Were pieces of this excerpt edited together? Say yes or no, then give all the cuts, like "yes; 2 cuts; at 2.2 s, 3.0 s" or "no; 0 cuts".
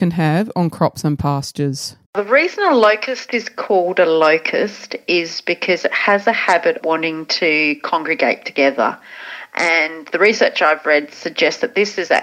yes; 2 cuts; at 2.0 s, 6.8 s